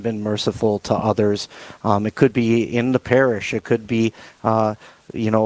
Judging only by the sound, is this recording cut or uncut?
uncut